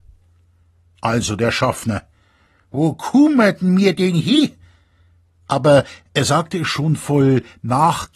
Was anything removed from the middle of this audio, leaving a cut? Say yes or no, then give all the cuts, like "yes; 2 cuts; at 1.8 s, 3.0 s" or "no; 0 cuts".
no; 0 cuts